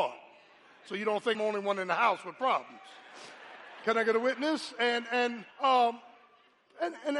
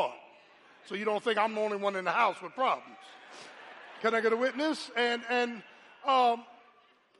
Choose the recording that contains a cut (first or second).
first